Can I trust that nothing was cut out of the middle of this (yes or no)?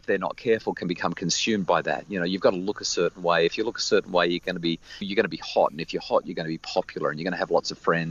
no